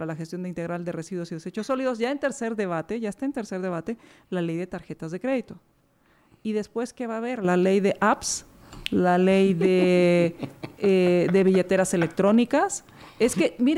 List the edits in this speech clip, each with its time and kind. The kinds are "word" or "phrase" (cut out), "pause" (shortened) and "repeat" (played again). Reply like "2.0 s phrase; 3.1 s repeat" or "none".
none

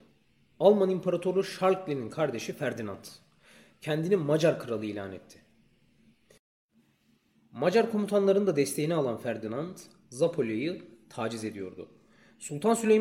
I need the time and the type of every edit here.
none

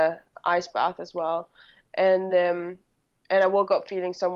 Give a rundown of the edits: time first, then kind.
none

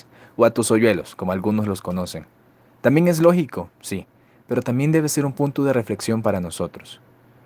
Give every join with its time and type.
none

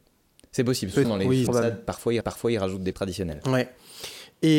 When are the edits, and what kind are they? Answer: 1.0 s word; 1.5 s phrase; 2.2 s repeat; 2.9 s word

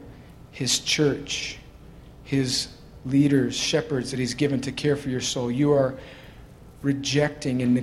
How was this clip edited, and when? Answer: none

